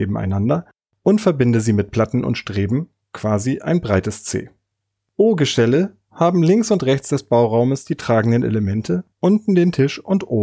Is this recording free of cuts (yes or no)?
no